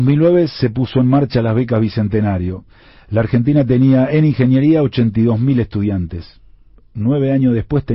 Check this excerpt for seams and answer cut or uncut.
uncut